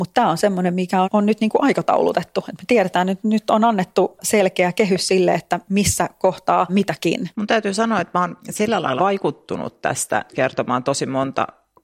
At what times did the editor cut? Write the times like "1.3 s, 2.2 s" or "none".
1.0 s, 6.7 s, 7.3 s, 8.4 s, 9.0 s, 10.3 s

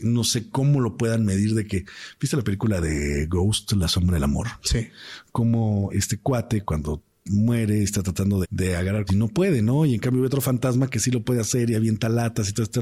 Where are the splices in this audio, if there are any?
5.9 s, 6.6 s, 8.4 s, 9.1 s

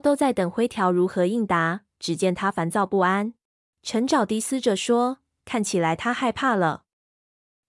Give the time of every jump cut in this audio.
3.5 s

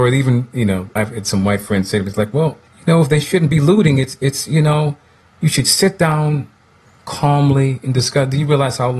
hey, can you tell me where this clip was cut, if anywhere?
1.0 s, 2.7 s

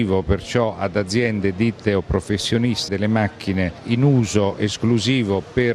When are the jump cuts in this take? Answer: 2.9 s

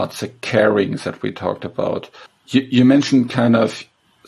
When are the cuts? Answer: 2.3 s

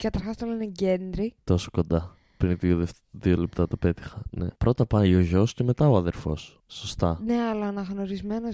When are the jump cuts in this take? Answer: 4.6 s

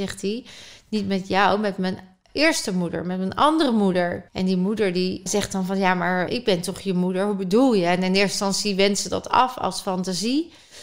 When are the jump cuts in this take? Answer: 4.3 s, 5.3 s, 6.3 s

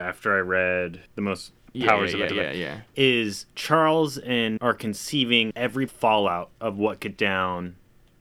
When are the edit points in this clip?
1.1 s, 1.7 s, 2.3 s, 3.5 s, 4.6 s, 5.5 s, 5.9 s, 7.2 s

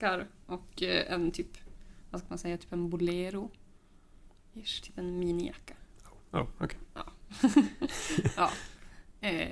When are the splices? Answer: none

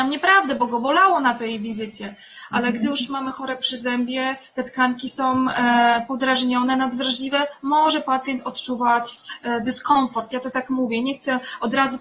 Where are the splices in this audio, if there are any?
none

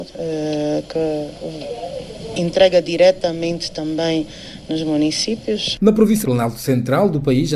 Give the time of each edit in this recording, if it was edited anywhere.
6.2 s

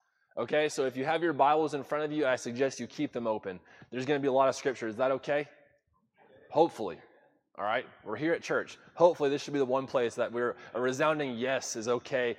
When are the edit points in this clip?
none

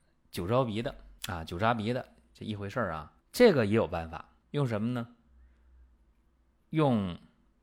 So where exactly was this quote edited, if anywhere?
1.2 s, 3.2 s, 4.4 s

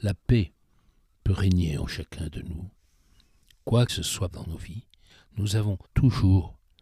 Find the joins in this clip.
3.9 s, 4.3 s, 5.8 s

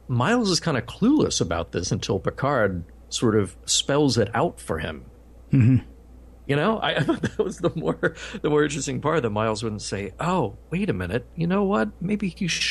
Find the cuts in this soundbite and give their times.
none

